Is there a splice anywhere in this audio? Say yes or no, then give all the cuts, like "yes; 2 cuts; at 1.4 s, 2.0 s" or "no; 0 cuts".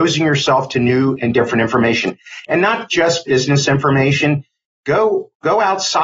no; 0 cuts